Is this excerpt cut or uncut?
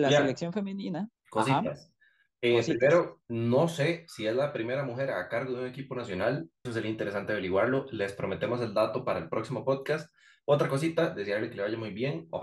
cut